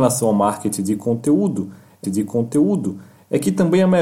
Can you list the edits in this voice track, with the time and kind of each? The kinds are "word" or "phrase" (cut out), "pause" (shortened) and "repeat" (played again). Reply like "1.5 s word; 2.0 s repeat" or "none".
2.0 s repeat